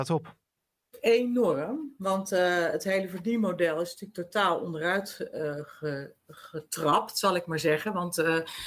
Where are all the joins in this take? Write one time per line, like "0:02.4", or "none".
none